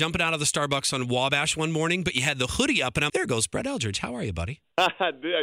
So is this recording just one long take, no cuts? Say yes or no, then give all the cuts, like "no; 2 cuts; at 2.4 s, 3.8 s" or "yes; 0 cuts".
no; 1 cut; at 3.1 s